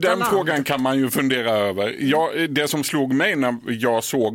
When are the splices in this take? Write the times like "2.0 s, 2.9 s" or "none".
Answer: none